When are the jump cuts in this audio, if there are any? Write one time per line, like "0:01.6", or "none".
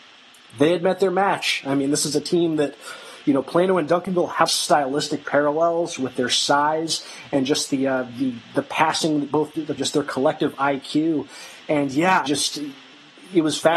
0:04.5
0:09.8
0:12.3